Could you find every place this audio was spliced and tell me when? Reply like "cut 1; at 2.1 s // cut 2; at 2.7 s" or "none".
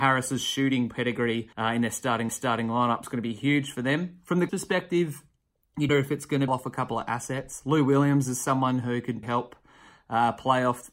cut 1; at 1.5 s // cut 2; at 2.3 s // cut 3; at 4.5 s // cut 4; at 5.9 s // cut 5; at 6.5 s // cut 6; at 9.2 s